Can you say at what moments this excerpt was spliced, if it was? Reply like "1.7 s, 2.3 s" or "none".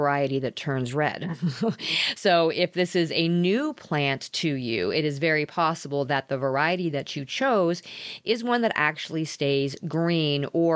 none